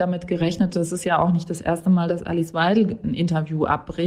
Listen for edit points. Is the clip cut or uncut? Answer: uncut